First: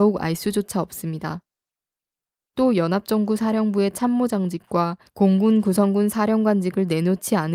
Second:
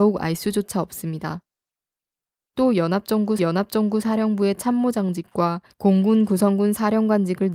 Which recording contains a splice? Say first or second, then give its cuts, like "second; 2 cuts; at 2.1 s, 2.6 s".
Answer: second; 1 cut; at 3.4 s